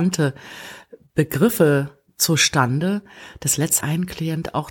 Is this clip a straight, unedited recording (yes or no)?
no